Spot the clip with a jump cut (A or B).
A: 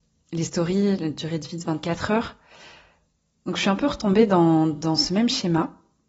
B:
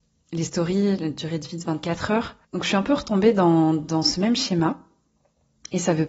B